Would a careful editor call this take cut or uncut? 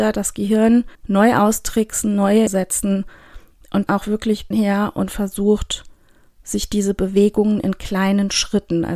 cut